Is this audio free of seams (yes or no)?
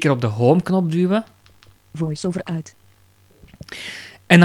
yes